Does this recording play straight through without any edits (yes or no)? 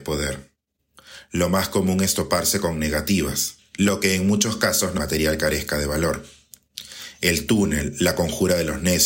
no